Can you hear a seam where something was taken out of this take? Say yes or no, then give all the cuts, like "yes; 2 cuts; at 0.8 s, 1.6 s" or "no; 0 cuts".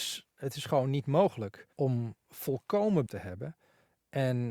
yes; 2 cuts; at 1.7 s, 3.1 s